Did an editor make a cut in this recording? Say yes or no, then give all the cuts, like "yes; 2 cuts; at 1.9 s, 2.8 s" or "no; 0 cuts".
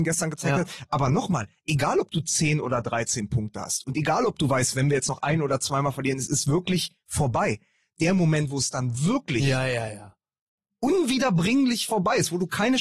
no; 0 cuts